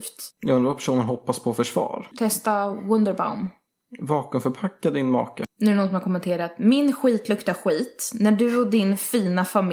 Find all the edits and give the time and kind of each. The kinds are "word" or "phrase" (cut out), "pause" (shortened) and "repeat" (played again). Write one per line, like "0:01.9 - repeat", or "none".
none